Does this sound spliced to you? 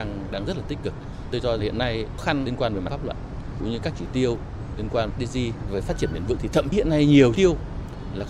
yes; 9 cuts; at 1.6 s, 2.2 s, 2.9 s, 3.6 s, 5.1 s, 5.7 s, 6.4 s, 6.7 s, 7.4 s

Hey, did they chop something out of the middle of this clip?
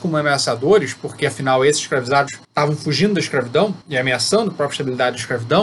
yes; 2 cuts; at 2.4 s, 3.8 s

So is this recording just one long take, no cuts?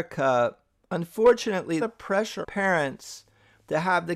no; 2 cuts; at 1.8 s, 2.4 s

